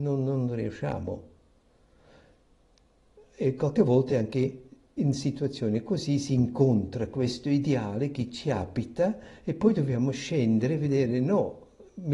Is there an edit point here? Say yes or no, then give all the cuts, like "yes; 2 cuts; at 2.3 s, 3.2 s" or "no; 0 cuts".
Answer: no; 0 cuts